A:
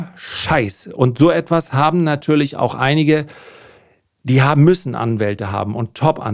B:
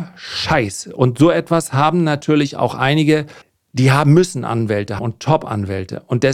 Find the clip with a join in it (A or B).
B